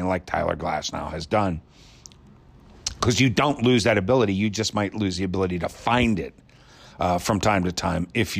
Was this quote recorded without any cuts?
yes; 0 cuts

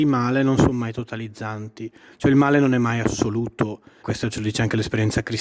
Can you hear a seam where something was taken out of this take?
yes; 1 cut; at 4.0 s

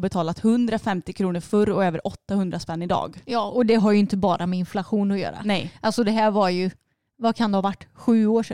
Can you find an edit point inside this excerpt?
no; 0 cuts

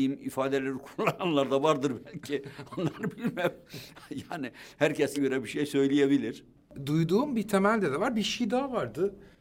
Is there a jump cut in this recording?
yes; 1 cut; at 5.1 s

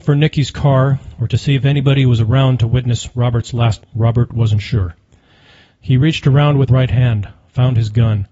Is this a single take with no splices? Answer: no; 2 cuts; at 3.8 s, 6.7 s

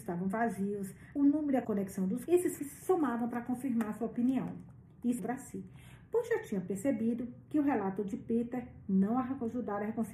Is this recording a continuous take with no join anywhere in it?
no; 5 cuts; at 1.2 s, 1.6 s, 2.3 s, 2.6 s, 5.2 s

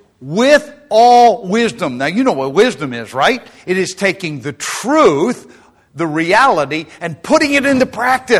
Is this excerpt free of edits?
yes; 0 cuts

